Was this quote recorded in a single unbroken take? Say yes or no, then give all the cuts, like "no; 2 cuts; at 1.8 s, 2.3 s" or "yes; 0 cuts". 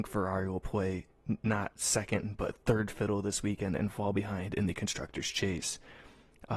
yes; 0 cuts